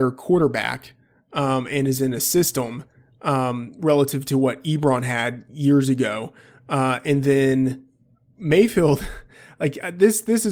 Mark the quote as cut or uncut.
uncut